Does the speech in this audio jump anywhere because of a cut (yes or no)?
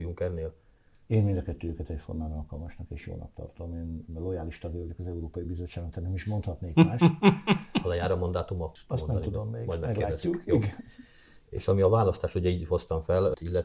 no